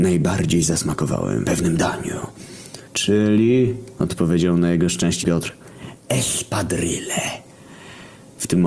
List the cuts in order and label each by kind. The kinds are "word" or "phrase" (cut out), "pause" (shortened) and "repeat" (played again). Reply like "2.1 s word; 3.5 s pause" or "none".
1.4 s word; 2.9 s pause; 5.2 s word